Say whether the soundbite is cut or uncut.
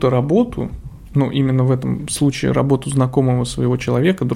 uncut